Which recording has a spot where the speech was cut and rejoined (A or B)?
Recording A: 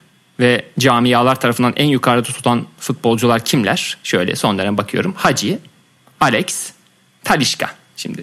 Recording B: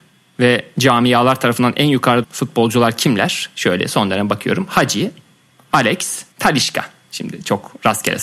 B